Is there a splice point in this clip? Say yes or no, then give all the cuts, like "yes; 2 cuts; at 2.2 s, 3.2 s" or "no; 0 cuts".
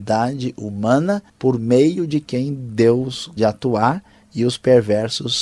yes; 2 cuts; at 1.3 s, 3.4 s